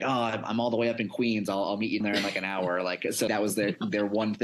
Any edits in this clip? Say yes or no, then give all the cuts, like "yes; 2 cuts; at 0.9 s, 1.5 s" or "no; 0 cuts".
yes; 2 cuts; at 2.0 s, 3.3 s